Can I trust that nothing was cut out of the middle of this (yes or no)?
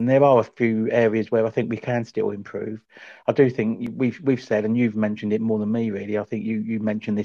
yes